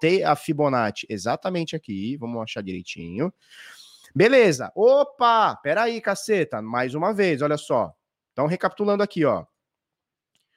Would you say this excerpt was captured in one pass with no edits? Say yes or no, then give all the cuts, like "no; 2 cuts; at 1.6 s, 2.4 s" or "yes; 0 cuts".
yes; 0 cuts